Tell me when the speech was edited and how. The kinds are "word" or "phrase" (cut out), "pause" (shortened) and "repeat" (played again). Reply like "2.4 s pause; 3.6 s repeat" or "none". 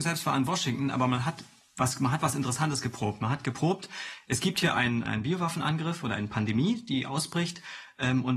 5.0 s word